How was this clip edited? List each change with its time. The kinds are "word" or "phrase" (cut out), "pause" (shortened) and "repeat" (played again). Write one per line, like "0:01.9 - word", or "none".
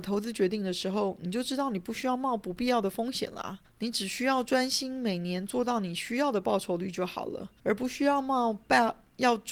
0:03.6 - pause
0:07.6 - pause